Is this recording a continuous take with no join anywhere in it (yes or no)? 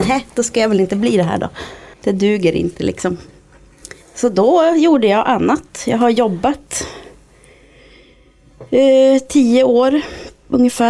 no